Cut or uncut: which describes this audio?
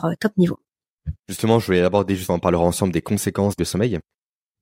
cut